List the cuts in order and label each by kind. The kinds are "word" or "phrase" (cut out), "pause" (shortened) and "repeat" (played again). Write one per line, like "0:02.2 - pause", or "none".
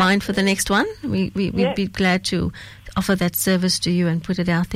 none